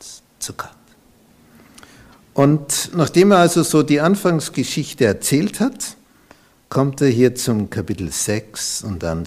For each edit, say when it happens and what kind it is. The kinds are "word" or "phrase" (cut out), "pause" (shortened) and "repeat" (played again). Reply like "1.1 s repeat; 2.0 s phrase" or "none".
none